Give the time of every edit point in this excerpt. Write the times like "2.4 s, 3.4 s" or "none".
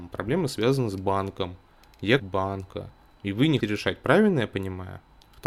2.2 s, 3.6 s